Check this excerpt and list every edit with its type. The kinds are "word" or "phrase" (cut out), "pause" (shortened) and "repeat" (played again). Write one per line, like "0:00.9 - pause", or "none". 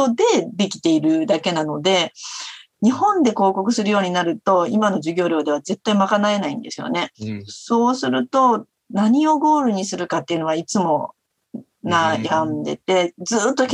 0:07.1 - pause